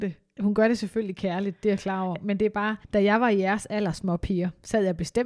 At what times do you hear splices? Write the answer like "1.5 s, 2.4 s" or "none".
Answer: 2.8 s